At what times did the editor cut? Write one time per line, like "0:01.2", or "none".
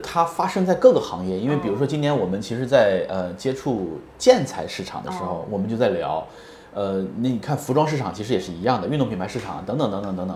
none

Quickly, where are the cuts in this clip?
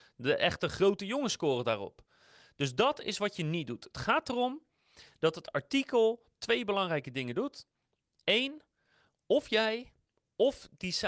none

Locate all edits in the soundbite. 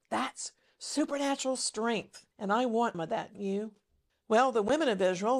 0:02.3
0:02.9
0:03.3
0:04.1

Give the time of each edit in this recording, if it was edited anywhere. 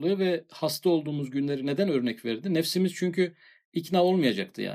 none

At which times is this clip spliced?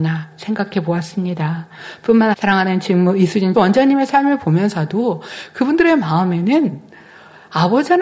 0:02.3
0:03.5

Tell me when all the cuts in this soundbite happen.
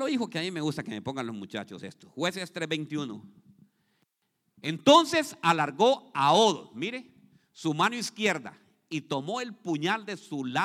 none

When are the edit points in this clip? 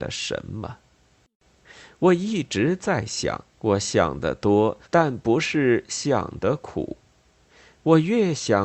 0:03.5
0:04.8

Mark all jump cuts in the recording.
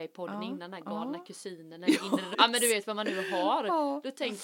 0:02.3

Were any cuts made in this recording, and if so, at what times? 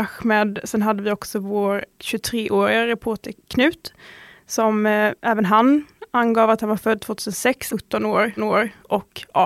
0:03.4
0:05.2
0:07.7
0:08.4

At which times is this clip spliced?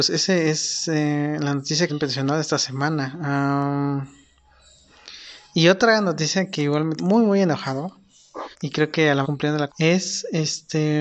0:01.9
0:07.0
0:08.5
0:09.2
0:09.7

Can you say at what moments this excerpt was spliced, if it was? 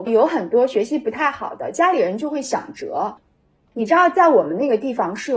none

